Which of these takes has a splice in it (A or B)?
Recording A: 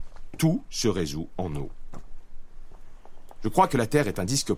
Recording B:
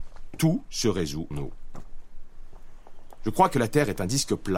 B